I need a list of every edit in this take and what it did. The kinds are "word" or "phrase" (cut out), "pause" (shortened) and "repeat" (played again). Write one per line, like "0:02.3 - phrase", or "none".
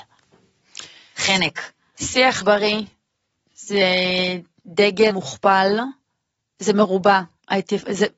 0:02.4 - word
0:05.1 - word

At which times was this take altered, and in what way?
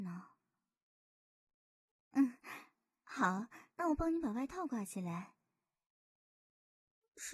0:03.7 - pause

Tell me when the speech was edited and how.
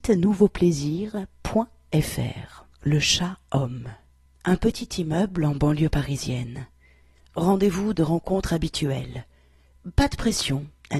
0:02.7 - pause
0:04.3 - pause
0:07.9 - phrase

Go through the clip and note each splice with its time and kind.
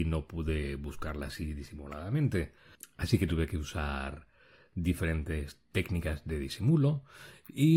none

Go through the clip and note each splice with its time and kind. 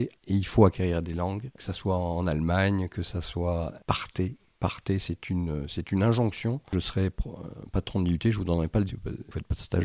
0:08.9 - word

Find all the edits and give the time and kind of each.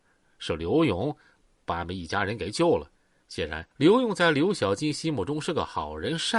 0:02.9 - pause
0:03.7 - pause

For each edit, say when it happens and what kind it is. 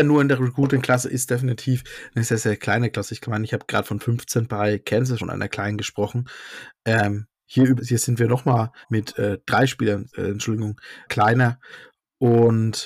0:02.3 - word
0:05.2 - word
0:07.8 - word
0:08.8 - pause
0:10.1 - word
0:11.1 - phrase

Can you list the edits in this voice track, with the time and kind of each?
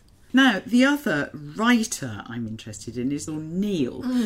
0:02.5 - word
0:03.3 - word

